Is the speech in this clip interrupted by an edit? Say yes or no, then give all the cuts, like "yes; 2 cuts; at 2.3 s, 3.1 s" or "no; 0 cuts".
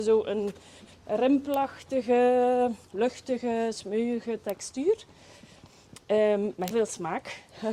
yes; 2 cuts; at 2.8 s, 6.7 s